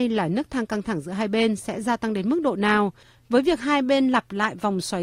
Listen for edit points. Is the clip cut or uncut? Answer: uncut